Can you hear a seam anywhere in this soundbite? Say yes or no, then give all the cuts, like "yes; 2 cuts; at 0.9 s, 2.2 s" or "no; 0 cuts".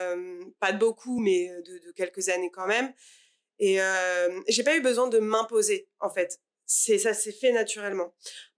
no; 0 cuts